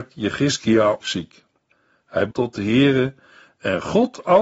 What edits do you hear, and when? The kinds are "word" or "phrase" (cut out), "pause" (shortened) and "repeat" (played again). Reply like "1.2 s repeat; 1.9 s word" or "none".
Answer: 1.0 s word; 2.3 s word